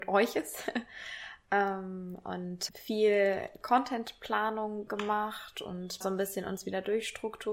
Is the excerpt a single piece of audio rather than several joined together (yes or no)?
no